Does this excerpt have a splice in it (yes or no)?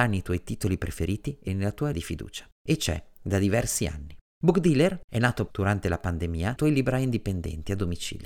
yes